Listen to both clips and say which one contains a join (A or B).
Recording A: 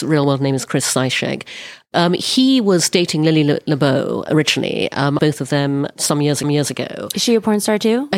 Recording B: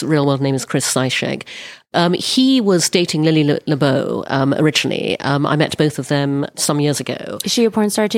A